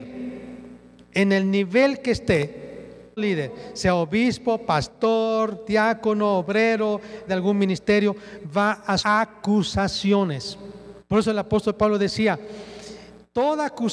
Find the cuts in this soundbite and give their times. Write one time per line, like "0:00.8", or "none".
0:03.2
0:07.3
0:09.0
0:11.0